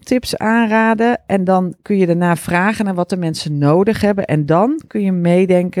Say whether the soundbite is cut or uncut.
uncut